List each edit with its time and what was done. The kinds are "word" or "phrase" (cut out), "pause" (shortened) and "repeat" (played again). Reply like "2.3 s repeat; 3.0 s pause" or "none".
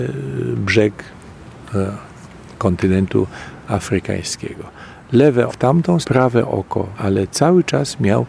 5.5 s word; 6.0 s word; 6.9 s word